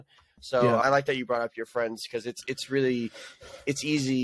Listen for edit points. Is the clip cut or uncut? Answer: uncut